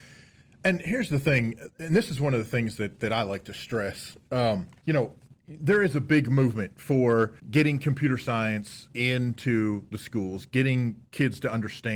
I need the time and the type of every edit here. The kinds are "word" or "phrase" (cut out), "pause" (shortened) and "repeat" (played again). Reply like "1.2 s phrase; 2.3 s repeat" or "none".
4.8 s pause; 5.3 s pause; 7.4 s pause; 11.1 s pause